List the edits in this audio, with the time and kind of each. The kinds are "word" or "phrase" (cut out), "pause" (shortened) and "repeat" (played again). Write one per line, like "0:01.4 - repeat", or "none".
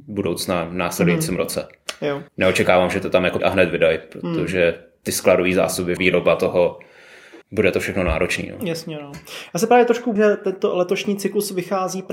0:02.3 - pause
0:03.4 - word
0:06.0 - word
0:07.4 - pause
0:10.2 - word